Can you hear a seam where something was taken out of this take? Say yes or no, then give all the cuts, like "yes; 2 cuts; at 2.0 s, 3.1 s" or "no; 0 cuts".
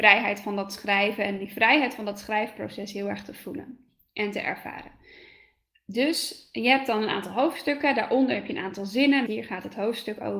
yes; 1 cut; at 9.3 s